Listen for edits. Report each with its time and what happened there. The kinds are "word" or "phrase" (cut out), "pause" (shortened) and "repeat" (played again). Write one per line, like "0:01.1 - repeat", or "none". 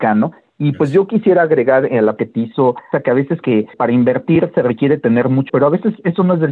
0:02.2 - word
0:02.9 - word
0:03.4 - word
0:03.7 - word
0:05.5 - word